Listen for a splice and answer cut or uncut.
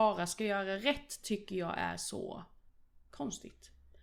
cut